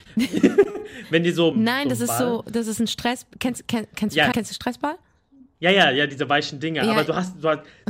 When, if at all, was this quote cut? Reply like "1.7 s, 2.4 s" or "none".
1.5 s, 4.3 s